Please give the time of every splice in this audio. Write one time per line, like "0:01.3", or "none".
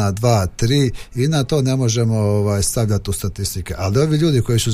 none